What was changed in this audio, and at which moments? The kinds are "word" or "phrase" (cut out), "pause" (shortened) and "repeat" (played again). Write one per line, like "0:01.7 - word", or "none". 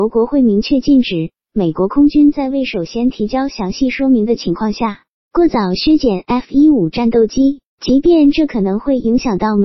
0:07.7 - pause